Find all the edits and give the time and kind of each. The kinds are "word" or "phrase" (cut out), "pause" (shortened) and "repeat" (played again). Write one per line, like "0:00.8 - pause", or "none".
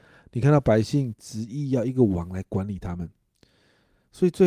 none